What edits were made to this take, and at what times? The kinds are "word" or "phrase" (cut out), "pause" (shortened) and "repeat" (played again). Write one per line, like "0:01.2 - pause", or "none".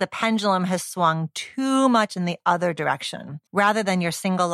0:03.5 - pause